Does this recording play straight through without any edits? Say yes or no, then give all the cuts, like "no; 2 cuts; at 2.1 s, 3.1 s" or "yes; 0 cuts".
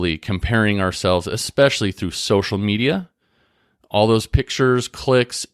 yes; 0 cuts